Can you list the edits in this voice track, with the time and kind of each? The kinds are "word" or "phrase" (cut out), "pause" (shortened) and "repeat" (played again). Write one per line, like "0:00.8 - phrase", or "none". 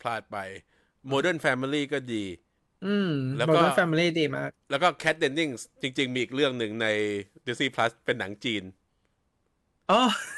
0:02.6 - pause